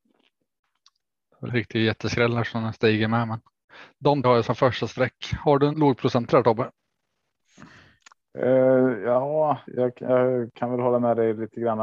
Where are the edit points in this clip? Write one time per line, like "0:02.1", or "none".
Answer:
0:01.5
0:04.2
0:05.7
0:09.7